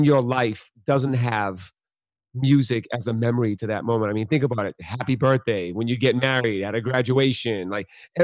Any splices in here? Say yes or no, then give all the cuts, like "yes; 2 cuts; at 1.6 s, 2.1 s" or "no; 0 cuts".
no; 0 cuts